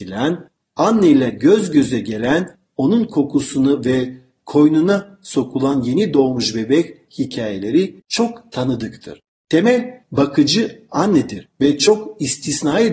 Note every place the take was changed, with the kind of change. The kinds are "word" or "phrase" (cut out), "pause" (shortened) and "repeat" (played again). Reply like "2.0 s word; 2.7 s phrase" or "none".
none